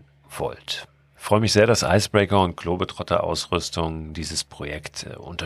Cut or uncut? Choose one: uncut